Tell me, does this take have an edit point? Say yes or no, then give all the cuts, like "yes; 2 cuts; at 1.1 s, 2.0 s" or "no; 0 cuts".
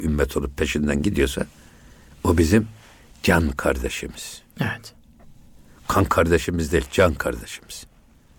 no; 0 cuts